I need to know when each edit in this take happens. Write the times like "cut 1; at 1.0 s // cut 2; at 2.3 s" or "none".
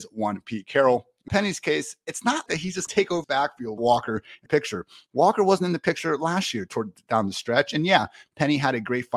cut 1; at 1.3 s // cut 2; at 2.5 s // cut 3; at 2.9 s // cut 4; at 3.2 s // cut 5; at 3.8 s // cut 6; at 4.5 s